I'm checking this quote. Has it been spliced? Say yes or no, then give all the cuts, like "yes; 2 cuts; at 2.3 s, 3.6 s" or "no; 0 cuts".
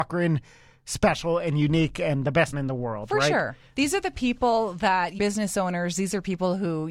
yes; 2 cuts; at 2.5 s, 5.2 s